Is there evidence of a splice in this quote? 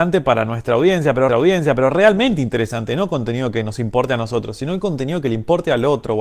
yes; 1 cut; at 1.3 s

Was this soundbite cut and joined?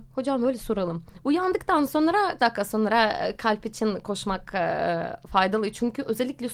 yes; 1 cut; at 2.4 s

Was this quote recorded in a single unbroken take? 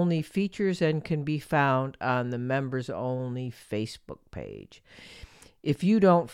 yes; 0 cuts

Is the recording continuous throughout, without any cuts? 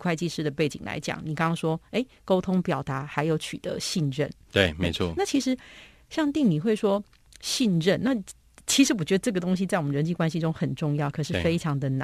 yes; 0 cuts

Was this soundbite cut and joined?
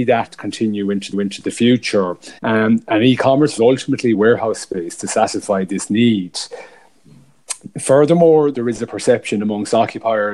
yes; 5 cuts; at 1.1 s, 2.4 s, 3.6 s, 4.1 s, 8.5 s

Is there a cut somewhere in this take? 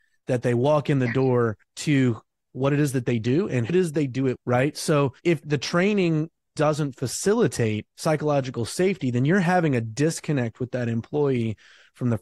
yes; 6 cuts; at 1.6 s, 3.7 s, 4.4 s, 5.2 s, 6.6 s, 7.9 s

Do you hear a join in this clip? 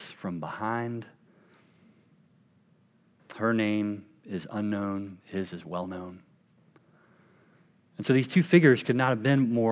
no; 0 cuts

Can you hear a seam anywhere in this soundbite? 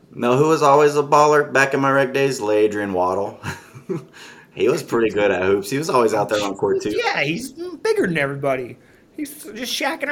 no; 0 cuts

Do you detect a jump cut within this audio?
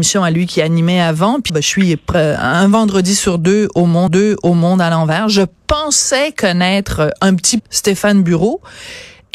yes; 3 cuts; at 1.5 s, 4.1 s, 7.6 s

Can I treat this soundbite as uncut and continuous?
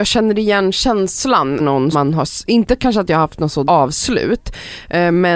no; 3 cuts; at 1.6 s, 1.9 s, 3.7 s

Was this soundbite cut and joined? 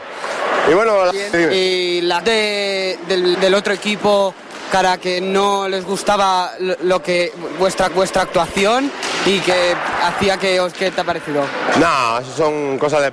yes; 4 cuts; at 2.2 s, 3.3 s, 7.9 s, 10.7 s

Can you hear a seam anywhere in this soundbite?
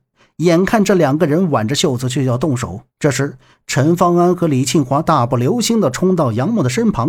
yes; 1 cut; at 2.9 s

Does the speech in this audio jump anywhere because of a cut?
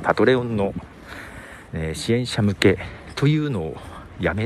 yes; 1 cut; at 1.7 s

